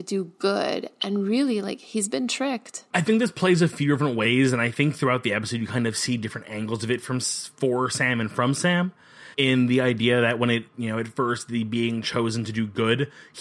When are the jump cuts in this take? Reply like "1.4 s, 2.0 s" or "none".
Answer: 9.3 s